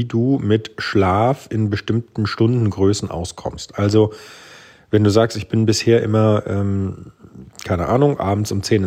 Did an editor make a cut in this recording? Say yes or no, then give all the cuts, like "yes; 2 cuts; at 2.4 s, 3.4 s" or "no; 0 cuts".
no; 0 cuts